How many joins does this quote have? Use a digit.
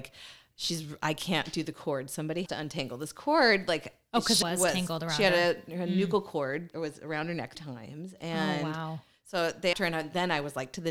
5